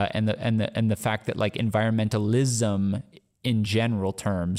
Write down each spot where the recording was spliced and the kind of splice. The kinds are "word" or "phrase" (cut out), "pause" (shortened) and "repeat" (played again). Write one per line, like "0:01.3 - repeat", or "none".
none